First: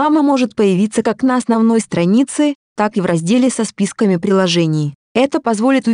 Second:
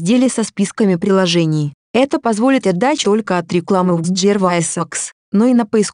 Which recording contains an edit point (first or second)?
second